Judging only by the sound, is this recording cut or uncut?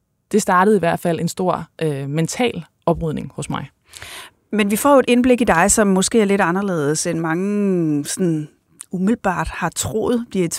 uncut